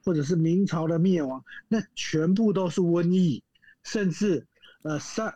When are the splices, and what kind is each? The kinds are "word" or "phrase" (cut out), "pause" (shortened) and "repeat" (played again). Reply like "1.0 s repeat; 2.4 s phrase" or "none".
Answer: none